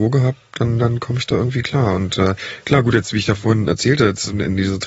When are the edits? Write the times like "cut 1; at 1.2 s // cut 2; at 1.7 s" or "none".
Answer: none